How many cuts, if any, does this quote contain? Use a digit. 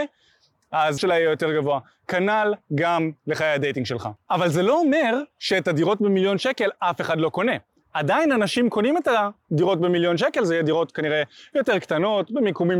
1